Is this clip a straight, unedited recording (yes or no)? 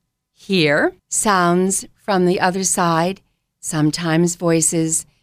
no